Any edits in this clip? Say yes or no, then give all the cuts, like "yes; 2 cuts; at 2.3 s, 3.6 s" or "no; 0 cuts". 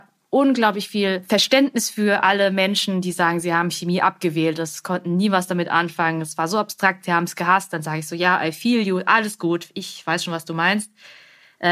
no; 0 cuts